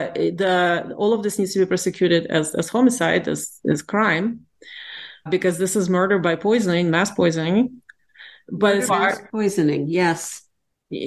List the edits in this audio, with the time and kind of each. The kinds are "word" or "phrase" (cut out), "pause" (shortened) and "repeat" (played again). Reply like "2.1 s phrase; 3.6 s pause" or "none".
5.3 s word; 8.9 s word